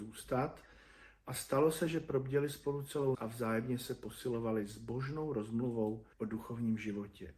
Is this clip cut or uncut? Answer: cut